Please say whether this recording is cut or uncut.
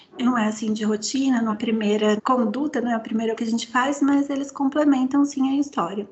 cut